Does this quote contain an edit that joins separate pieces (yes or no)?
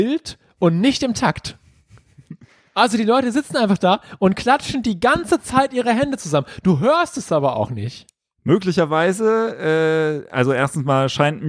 no